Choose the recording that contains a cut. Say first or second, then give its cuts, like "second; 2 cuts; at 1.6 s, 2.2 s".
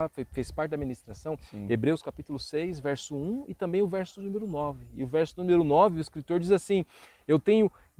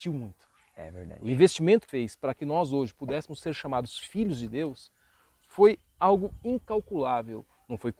second; 1 cut; at 1.9 s